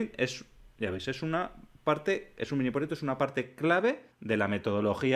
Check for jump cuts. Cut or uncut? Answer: cut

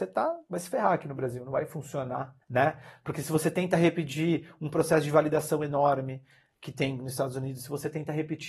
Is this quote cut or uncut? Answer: cut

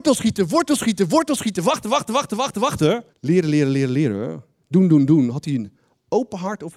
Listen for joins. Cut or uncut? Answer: cut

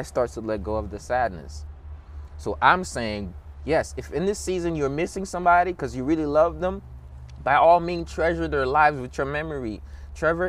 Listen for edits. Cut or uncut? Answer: uncut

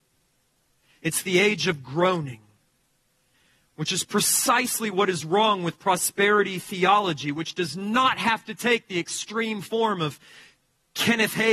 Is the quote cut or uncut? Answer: uncut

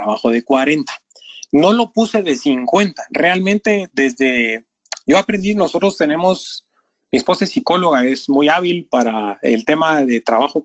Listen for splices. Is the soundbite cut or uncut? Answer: uncut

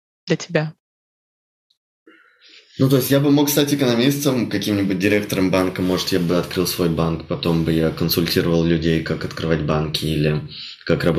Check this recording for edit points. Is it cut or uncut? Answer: uncut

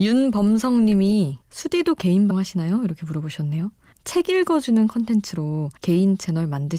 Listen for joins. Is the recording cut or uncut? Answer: cut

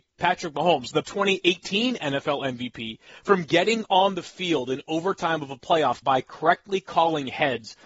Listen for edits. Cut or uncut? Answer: cut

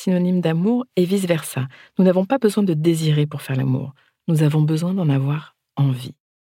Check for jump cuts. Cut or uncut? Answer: uncut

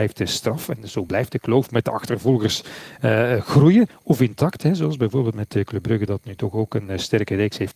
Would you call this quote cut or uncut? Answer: uncut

